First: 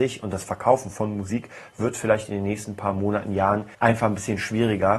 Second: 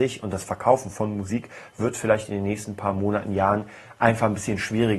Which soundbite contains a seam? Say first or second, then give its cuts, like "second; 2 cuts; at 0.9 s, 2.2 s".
first; 1 cut; at 3.7 s